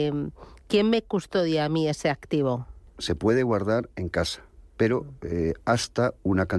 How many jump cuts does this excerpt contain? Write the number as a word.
two